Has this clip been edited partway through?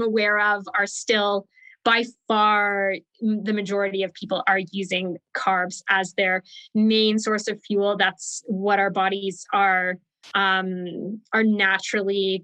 no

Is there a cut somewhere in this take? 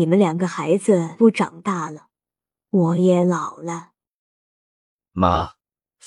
no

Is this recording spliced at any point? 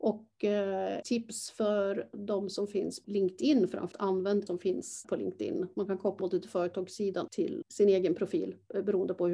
yes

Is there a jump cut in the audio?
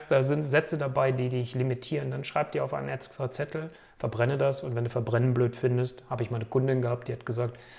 no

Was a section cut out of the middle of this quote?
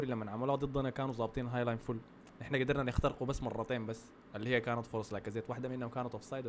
yes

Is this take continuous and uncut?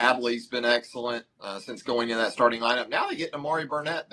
yes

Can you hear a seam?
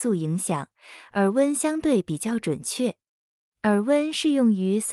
no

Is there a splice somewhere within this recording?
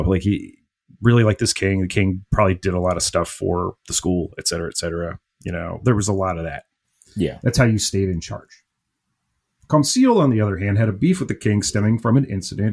no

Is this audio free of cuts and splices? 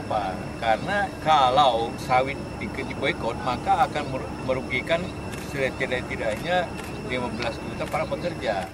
yes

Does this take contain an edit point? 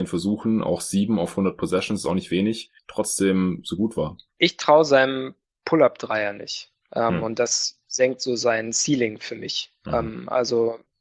no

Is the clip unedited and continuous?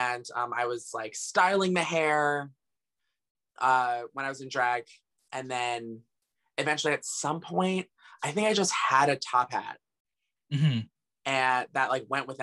yes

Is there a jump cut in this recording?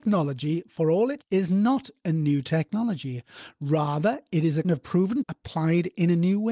yes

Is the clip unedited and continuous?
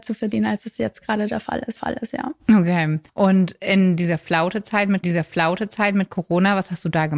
no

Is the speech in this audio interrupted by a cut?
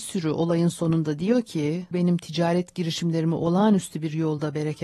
yes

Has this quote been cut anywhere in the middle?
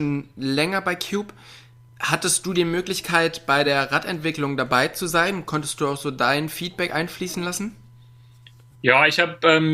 no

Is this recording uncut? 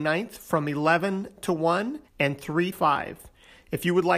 no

